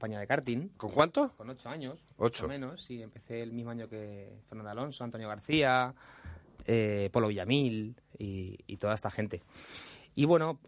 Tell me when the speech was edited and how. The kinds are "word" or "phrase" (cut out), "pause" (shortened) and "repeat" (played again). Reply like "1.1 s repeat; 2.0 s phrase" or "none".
4.4 s pause